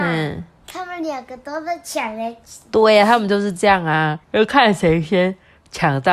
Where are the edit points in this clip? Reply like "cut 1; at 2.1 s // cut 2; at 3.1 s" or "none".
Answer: cut 1; at 4.2 s